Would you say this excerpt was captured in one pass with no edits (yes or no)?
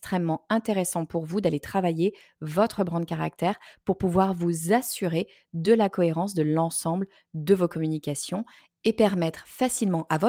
yes